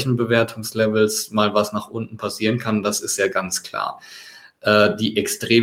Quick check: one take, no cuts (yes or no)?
yes